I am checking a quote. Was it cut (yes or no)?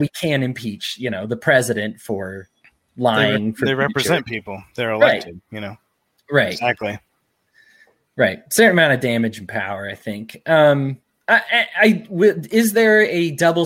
no